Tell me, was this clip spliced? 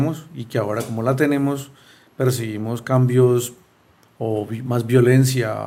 no; 0 cuts

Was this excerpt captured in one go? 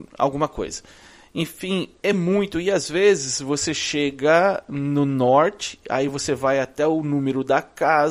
yes; 0 cuts

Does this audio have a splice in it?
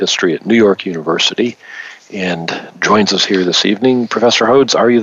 no; 0 cuts

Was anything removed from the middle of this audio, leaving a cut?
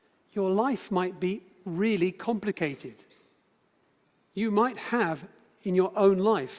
no; 0 cuts

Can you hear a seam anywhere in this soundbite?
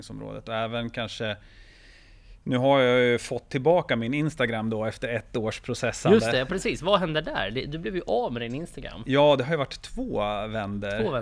no; 0 cuts

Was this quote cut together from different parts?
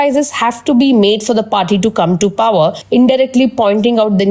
no; 0 cuts

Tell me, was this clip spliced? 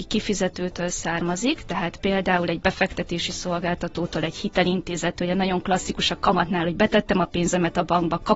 no; 0 cuts

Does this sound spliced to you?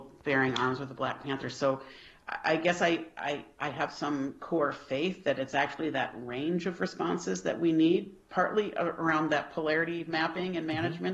no; 0 cuts

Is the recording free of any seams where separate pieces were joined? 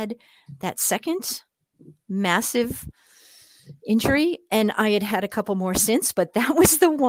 yes; 0 cuts

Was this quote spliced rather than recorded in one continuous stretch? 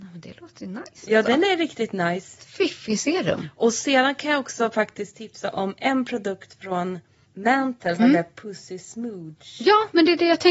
yes; 1 cut; at 8.0 s

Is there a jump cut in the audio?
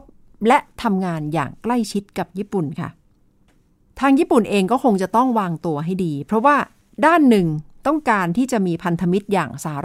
no; 0 cuts

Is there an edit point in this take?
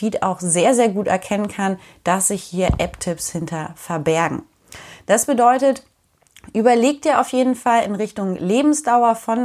no; 0 cuts

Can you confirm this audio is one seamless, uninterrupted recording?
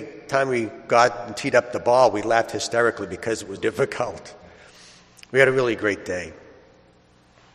no; 1 cut; at 3.6 s

